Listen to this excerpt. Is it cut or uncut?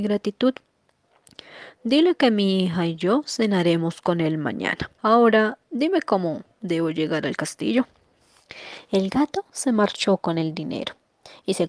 cut